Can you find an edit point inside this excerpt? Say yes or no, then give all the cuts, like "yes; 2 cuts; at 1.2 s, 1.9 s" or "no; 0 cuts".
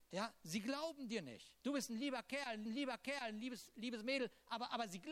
yes; 2 cuts; at 1.6 s, 2.7 s